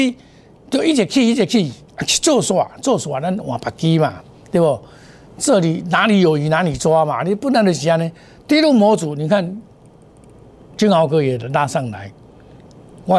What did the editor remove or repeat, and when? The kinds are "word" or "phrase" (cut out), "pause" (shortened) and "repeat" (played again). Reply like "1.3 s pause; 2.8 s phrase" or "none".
none